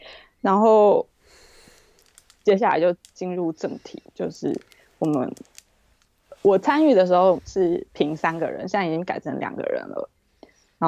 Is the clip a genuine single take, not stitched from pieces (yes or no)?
yes